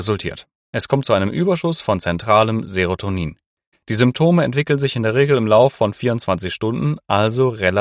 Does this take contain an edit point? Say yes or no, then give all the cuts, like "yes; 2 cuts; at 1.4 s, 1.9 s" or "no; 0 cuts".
no; 0 cuts